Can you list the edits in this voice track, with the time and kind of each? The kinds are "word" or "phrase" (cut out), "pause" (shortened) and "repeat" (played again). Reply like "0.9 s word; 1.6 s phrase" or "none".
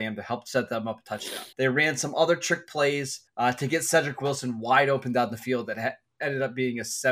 1.5 s pause; 3.3 s pause